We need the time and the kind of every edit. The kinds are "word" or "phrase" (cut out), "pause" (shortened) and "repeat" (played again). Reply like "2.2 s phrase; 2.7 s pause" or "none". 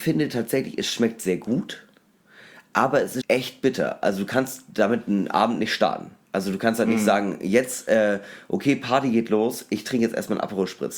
3.2 s word; 6.2 s pause